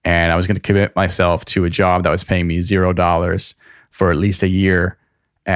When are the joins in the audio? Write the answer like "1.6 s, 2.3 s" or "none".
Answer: none